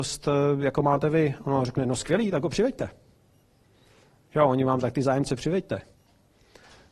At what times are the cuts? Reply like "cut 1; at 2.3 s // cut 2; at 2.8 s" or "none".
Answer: cut 1; at 4.8 s